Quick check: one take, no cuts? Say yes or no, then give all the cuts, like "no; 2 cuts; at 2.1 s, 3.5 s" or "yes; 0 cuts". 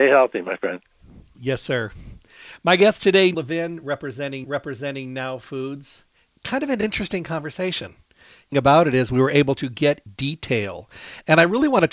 no; 4 cuts; at 3.3 s, 4.4 s, 8.5 s, 10.1 s